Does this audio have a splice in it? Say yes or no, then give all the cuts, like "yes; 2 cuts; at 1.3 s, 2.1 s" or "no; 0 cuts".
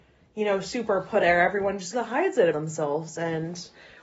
yes; 3 cuts; at 1.2 s, 1.9 s, 2.5 s